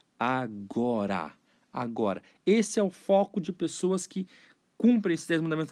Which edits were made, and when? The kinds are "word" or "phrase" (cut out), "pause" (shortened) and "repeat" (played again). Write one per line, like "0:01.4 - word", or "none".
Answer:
none